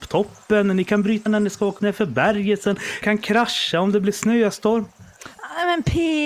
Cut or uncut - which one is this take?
cut